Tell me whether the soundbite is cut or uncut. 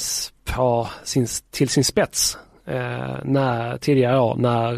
uncut